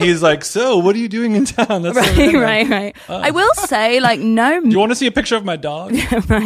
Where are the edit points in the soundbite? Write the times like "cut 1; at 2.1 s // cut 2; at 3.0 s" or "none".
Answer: none